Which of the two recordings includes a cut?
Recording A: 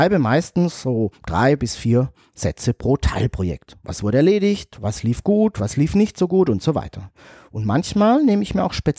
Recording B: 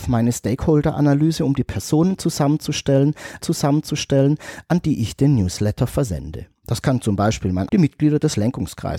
B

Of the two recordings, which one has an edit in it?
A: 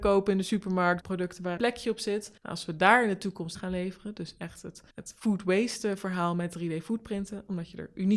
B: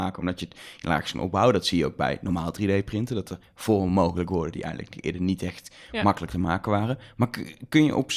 A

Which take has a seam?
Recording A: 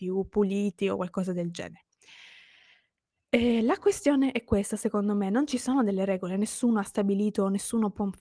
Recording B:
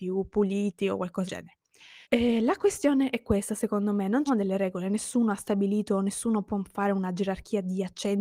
B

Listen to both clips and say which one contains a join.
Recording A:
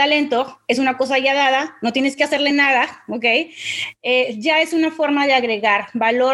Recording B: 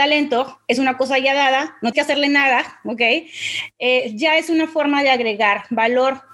B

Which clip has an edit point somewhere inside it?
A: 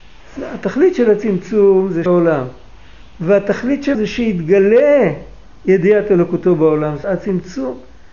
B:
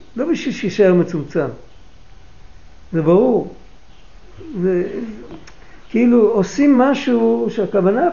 A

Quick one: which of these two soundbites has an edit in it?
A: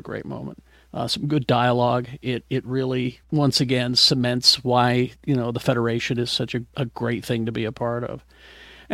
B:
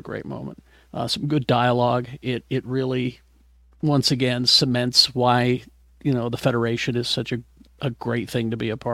A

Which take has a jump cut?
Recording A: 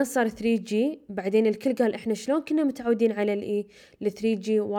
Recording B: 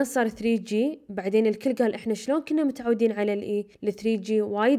B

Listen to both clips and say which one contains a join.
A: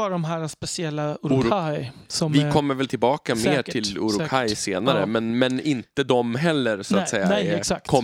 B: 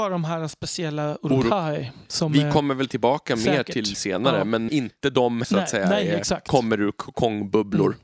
B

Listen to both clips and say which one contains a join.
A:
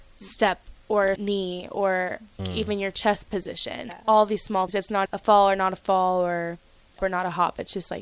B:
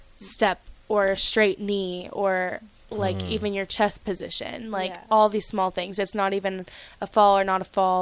A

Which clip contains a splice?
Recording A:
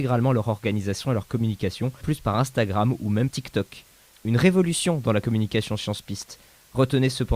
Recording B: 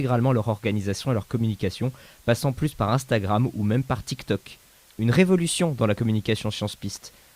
A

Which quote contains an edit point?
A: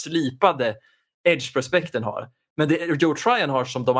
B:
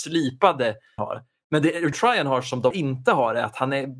B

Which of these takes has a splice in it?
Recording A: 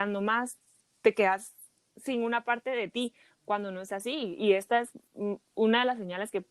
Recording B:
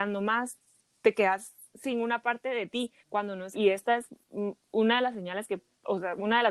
B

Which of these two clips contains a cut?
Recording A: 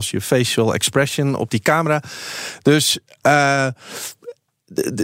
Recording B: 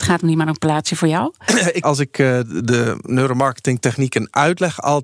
B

